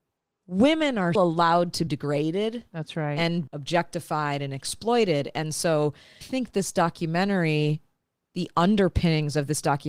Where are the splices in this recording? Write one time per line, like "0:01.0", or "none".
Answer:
0:01.1
0:01.9
0:03.5
0:06.2